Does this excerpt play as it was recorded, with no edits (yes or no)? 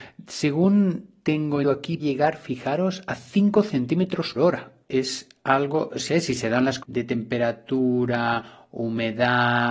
no